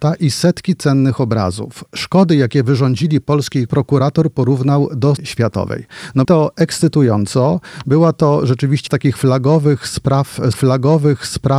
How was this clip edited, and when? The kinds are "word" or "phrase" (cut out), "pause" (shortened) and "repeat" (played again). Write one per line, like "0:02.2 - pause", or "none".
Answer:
0:03.7 - word
0:05.2 - phrase
0:06.2 - word
0:08.9 - word
0:10.5 - repeat